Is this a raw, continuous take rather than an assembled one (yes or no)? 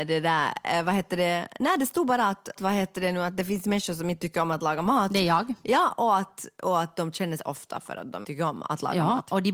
no